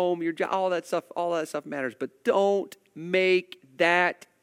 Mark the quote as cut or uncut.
uncut